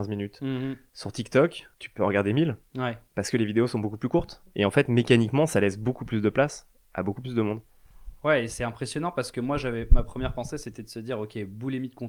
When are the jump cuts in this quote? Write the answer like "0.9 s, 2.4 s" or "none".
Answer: 1.7 s